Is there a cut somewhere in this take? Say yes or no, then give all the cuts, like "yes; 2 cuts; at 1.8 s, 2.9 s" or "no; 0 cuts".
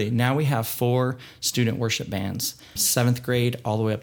yes; 1 cut; at 2.8 s